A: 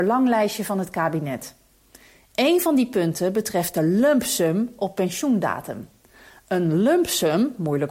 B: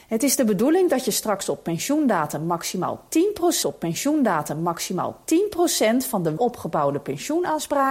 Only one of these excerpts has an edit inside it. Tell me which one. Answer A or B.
B